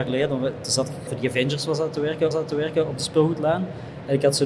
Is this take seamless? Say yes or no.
no